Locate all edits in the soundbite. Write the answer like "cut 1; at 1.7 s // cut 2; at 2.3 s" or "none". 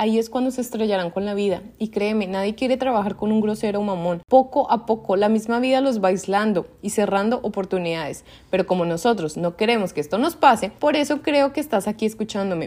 cut 1; at 10.8 s

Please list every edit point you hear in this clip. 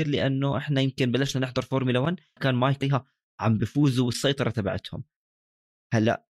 cut 1; at 2.4 s // cut 2; at 2.8 s

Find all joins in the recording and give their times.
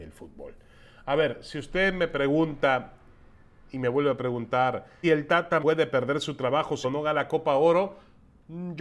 cut 1; at 5.0 s // cut 2; at 5.6 s // cut 3; at 6.8 s

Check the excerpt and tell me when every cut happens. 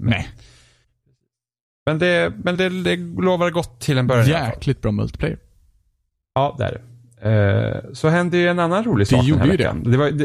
cut 1; at 2.5 s

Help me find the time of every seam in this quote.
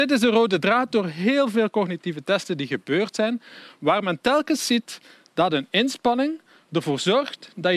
none

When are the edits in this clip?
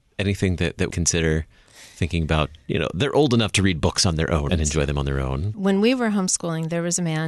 cut 1; at 0.9 s // cut 2; at 4.5 s

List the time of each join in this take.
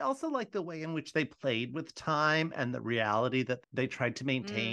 cut 1; at 3.6 s

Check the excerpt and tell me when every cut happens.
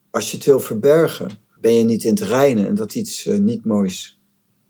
cut 1; at 1.6 s // cut 2; at 2.9 s

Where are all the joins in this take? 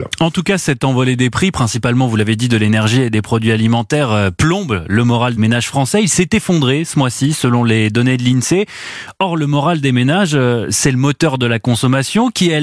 cut 1; at 5.4 s

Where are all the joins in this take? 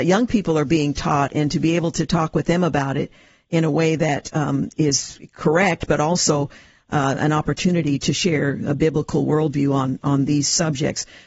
none

